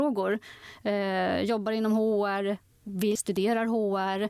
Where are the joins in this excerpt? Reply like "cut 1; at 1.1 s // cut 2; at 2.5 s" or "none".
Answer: cut 1; at 3.2 s